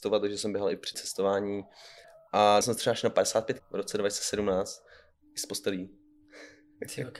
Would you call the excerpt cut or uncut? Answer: cut